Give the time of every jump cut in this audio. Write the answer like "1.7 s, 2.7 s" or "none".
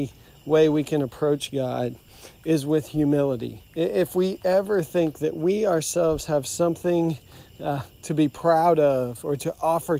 3.7 s